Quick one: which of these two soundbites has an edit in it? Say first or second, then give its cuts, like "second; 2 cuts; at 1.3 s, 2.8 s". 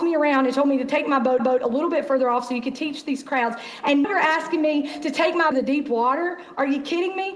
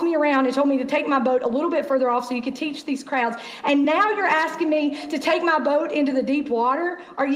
first; 3 cuts; at 1.4 s, 4.0 s, 5.5 s